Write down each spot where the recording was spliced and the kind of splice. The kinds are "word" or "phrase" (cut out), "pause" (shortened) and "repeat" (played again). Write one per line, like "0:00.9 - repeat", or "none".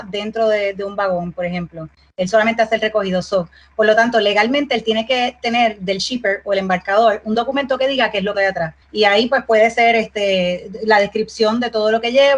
0:08.3 - phrase
0:08.8 - pause

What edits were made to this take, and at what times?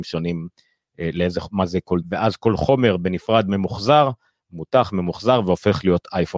0:02.0 - word

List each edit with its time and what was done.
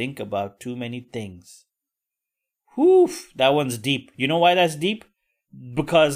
none

